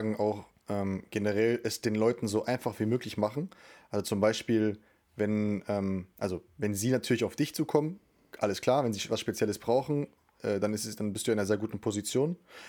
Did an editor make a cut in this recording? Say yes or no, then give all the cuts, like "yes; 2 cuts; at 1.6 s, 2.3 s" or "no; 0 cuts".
no; 0 cuts